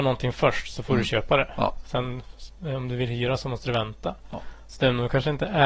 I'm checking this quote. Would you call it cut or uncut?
uncut